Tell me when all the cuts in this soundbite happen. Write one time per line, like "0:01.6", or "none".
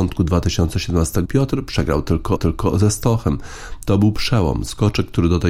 0:01.3
0:02.4